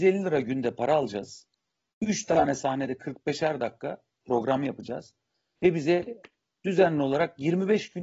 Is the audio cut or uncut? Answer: uncut